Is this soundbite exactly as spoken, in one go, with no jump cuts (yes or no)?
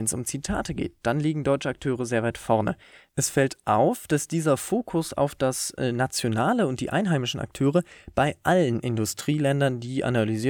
yes